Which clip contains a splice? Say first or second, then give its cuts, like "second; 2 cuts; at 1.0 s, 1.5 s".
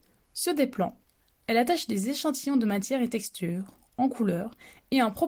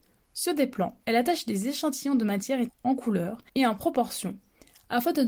second; 3 cuts; at 1.0 s, 2.7 s, 3.5 s